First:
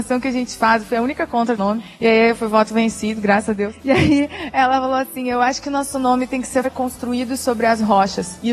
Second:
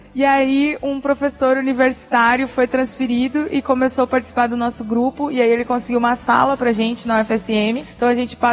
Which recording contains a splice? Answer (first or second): first